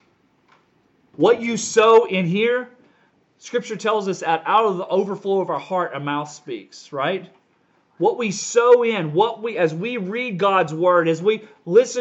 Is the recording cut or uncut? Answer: uncut